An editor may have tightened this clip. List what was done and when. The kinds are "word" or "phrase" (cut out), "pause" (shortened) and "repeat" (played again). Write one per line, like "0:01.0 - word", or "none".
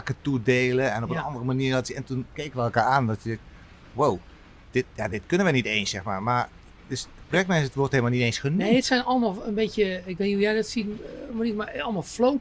0:04.9 - pause